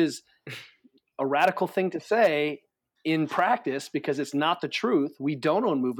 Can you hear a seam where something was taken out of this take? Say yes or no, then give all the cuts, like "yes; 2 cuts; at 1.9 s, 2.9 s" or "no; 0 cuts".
no; 0 cuts